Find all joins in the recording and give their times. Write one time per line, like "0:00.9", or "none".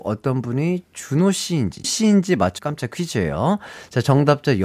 0:01.8
0:02.6